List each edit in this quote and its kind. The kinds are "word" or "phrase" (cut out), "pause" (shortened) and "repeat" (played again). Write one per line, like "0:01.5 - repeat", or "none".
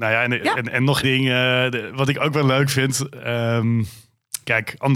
0:01.0 - word